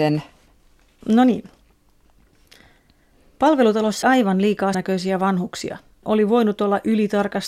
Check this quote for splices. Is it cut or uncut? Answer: cut